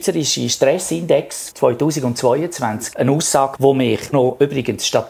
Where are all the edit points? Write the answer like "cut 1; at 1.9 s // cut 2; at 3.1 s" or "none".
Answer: cut 1; at 1.5 s // cut 2; at 2.9 s // cut 3; at 3.6 s // cut 4; at 4.1 s